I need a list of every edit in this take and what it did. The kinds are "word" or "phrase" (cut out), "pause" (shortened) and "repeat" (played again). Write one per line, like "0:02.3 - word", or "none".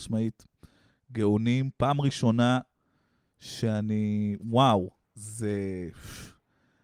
none